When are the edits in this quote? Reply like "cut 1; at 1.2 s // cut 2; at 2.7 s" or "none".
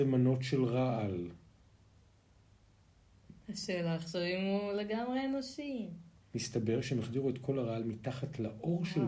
cut 1; at 6.2 s